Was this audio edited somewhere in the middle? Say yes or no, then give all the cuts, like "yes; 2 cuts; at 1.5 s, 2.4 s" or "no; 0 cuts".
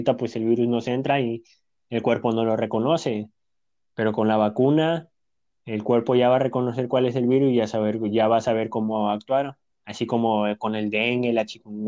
no; 0 cuts